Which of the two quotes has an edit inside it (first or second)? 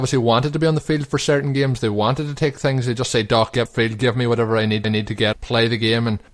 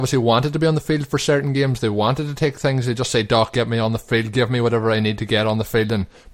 first